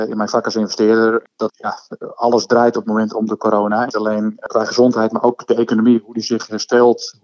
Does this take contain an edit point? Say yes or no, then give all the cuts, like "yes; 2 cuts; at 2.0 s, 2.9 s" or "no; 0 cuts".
yes; 4 cuts; at 1.5 s, 2.8 s, 3.9 s, 5.2 s